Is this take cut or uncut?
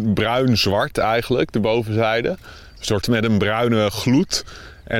cut